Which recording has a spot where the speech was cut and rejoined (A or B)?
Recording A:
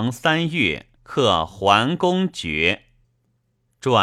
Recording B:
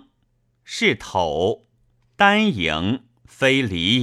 A